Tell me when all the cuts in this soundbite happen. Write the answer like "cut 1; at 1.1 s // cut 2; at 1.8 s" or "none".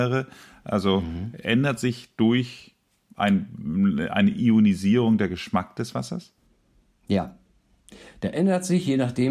none